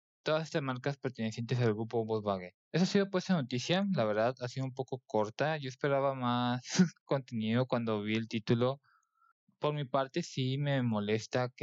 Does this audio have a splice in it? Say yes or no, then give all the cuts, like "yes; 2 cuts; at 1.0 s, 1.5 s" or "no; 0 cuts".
yes; 1 cut; at 2.6 s